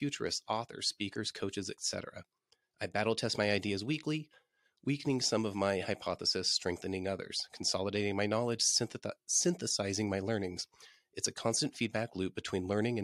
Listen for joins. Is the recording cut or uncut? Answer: uncut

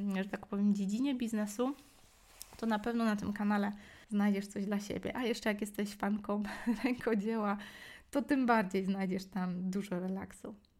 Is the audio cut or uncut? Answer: cut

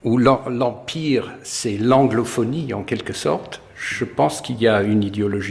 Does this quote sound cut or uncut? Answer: uncut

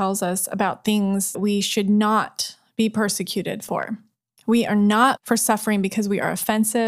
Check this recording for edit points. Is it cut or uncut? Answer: cut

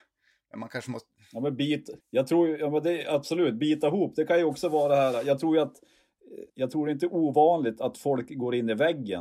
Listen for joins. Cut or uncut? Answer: cut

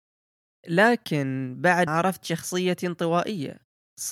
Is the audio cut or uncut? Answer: cut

